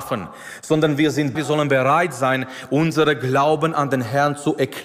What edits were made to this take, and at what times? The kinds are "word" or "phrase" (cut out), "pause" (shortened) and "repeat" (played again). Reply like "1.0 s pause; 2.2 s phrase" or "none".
1.3 s word

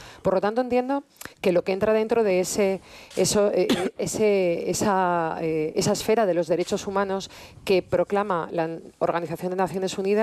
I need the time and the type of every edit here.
1.3 s pause

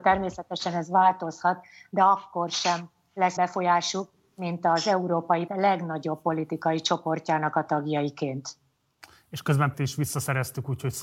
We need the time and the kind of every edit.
3.4 s word; 5.5 s word; 9.7 s word

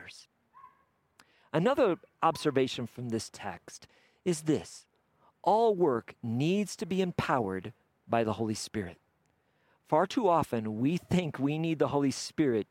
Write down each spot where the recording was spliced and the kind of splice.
none

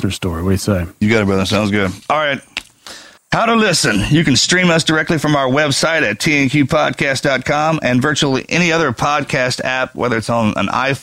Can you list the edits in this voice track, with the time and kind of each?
3.2 s pause

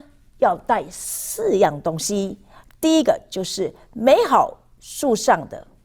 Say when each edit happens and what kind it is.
none

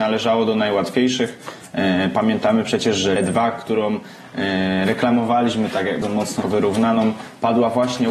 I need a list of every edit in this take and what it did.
3.2 s word; 6.0 s word; 6.4 s word

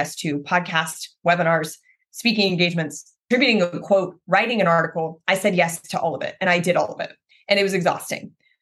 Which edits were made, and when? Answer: none

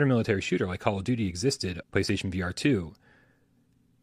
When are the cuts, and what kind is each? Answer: 1.8 s word

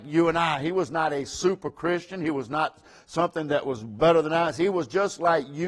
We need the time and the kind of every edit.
none

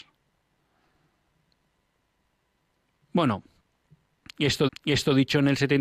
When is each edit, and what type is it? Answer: 4.7 s repeat

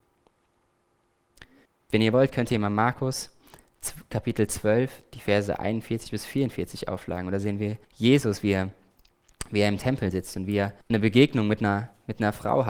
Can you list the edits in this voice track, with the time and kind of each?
1.6 s pause; 7.8 s pause; 10.8 s pause

